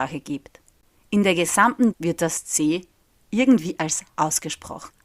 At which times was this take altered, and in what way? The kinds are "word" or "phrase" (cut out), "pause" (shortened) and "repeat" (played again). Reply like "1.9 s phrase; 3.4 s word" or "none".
1.9 s word; 4.1 s word